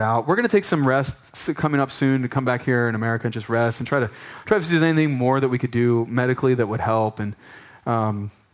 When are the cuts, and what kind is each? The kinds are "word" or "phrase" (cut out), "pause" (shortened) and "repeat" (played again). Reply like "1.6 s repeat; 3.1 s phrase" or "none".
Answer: none